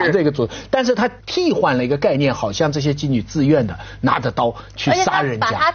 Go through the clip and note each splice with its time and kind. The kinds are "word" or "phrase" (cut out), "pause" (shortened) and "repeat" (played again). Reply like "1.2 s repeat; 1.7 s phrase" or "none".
1.2 s pause